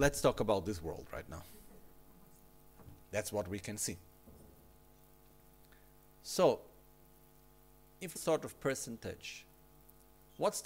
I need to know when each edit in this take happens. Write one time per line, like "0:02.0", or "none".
0:08.1